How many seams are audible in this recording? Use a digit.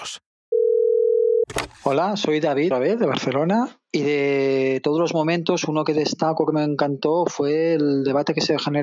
1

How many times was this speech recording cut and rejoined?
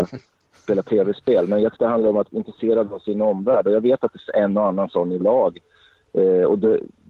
4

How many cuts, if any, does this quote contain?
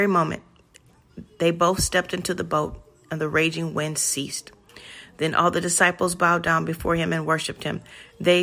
0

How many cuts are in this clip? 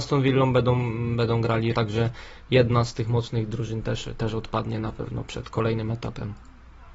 2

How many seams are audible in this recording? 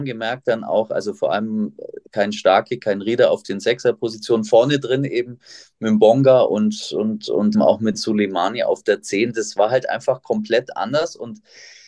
2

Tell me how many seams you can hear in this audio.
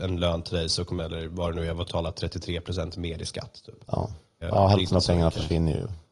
3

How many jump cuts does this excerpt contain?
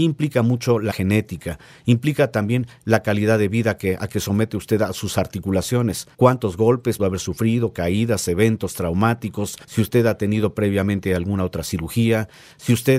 4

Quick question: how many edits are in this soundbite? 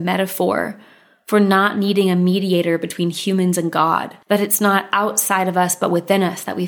1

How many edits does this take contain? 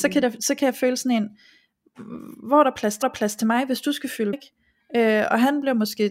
2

